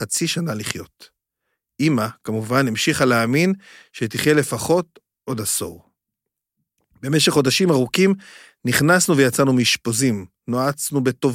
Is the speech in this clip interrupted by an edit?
no; 0 cuts

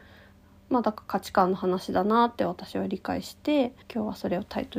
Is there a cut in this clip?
yes; 1 cut; at 3.8 s

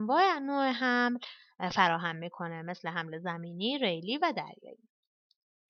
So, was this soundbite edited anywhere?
no; 0 cuts

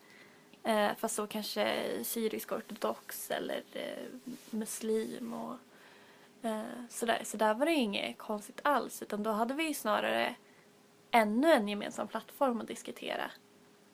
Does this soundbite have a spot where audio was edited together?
no; 0 cuts

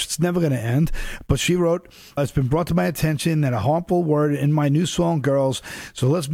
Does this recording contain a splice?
yes; 1 cut; at 2.2 s

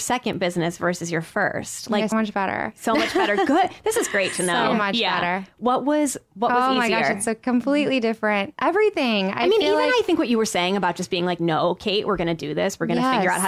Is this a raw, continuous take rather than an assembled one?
no; 1 cut; at 2.1 s

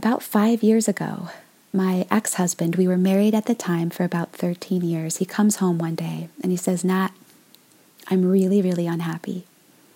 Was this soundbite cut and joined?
no; 0 cuts

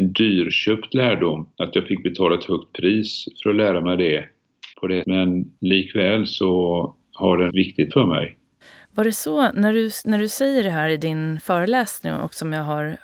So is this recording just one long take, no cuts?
no; 7 cuts; at 1.5 s, 4.7 s, 5.0 s, 5.6 s, 7.5 s, 7.9 s, 8.6 s

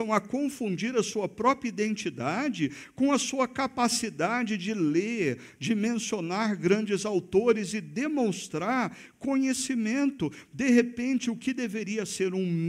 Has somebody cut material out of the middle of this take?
no; 0 cuts

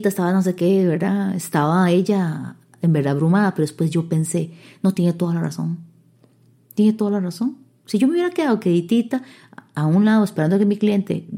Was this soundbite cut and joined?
no; 0 cuts

